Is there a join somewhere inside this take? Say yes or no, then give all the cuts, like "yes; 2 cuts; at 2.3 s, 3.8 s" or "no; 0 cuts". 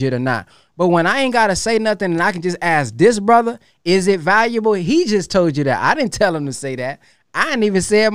no; 0 cuts